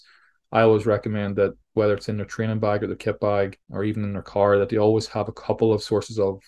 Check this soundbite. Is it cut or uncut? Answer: cut